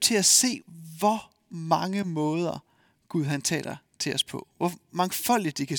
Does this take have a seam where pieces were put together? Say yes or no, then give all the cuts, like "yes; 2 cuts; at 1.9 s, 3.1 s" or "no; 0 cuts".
no; 0 cuts